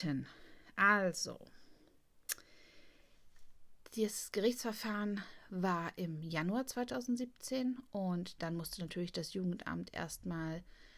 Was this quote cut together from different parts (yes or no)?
no